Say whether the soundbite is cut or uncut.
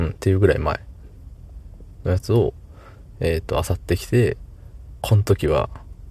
cut